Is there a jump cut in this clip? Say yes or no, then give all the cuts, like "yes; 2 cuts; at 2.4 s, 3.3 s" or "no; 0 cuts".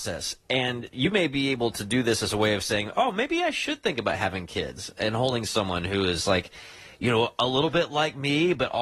no; 0 cuts